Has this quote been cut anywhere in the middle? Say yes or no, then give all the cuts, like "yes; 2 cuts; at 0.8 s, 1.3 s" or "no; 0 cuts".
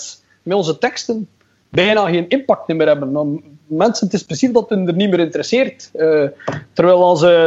no; 0 cuts